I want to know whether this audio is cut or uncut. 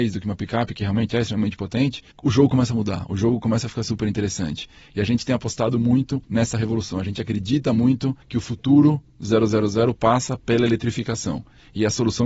cut